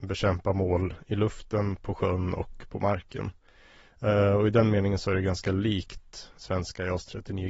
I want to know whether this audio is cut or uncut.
uncut